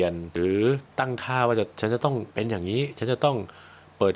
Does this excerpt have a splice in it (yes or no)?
yes